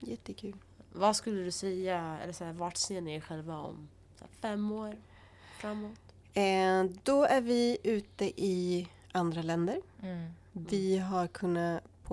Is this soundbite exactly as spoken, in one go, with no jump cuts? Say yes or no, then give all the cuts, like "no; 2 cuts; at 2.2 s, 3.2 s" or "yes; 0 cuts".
yes; 0 cuts